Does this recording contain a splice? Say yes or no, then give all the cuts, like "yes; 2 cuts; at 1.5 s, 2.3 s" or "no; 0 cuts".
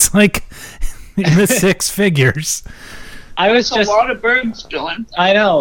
no; 0 cuts